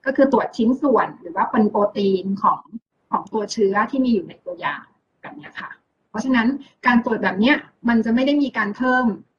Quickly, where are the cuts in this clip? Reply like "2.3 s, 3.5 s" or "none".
none